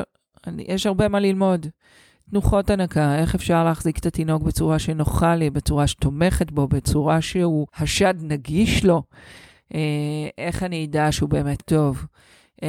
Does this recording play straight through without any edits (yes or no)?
no